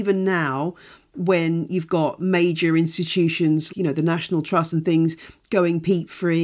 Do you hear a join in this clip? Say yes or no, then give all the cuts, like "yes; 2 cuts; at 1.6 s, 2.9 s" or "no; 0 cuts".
yes; 1 cut; at 3.7 s